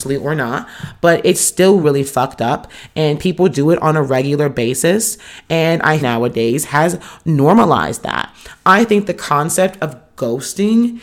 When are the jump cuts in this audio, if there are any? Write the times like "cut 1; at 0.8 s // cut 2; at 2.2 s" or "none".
cut 1; at 1.8 s // cut 2; at 6.0 s